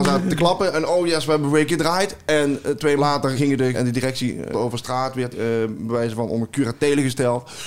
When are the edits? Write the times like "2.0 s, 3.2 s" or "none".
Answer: 1.7 s, 3.0 s, 3.3 s, 3.7 s, 4.5 s, 5.3 s